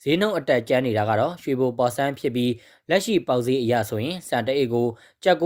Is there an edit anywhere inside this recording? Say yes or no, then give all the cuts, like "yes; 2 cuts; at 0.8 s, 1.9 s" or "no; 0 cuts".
no; 0 cuts